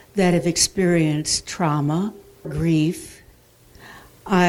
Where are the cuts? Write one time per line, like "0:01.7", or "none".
0:02.4